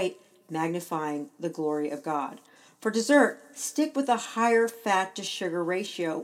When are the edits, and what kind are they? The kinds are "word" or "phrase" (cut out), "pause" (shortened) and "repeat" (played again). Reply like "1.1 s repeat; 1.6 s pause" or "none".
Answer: none